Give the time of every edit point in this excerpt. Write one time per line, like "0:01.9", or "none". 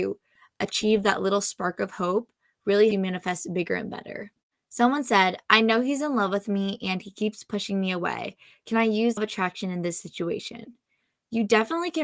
0:02.9
0:09.2